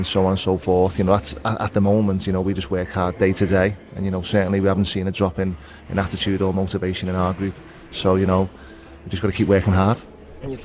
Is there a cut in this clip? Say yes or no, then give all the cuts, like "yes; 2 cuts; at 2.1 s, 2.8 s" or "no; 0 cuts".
no; 0 cuts